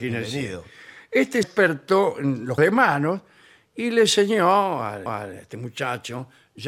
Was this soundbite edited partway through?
yes; 3 cuts; at 1.4 s, 2.6 s, 5.1 s

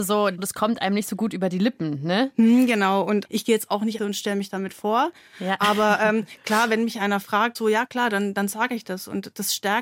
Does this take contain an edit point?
yes; 1 cut; at 4.0 s

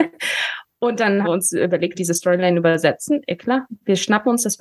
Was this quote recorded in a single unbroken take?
no; 2 cuts; at 1.2 s, 1.9 s

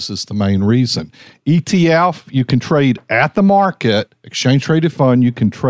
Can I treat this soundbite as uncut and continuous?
yes; 0 cuts

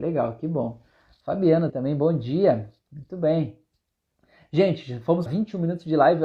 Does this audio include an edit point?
yes; 2 cuts; at 1.7 s, 5.3 s

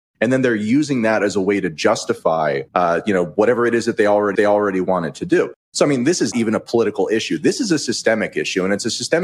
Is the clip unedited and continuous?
no; 3 cuts; at 2.7 s, 4.3 s, 6.3 s

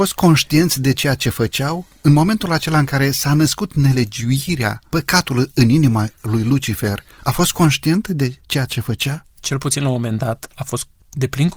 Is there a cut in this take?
no; 0 cuts

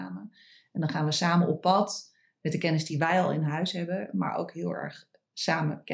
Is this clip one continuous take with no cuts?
yes; 0 cuts

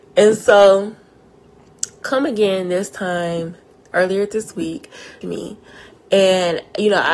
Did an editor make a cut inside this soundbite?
yes; 2 cuts; at 3.7 s, 5.2 s

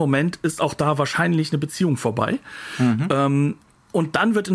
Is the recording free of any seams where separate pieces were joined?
yes; 0 cuts

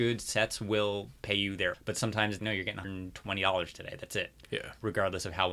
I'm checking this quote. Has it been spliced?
yes; 3 cuts; at 1.7 s, 2.4 s, 2.8 s

